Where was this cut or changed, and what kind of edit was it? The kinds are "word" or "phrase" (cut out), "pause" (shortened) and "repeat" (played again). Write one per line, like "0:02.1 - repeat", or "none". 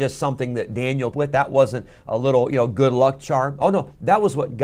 0:01.1 - phrase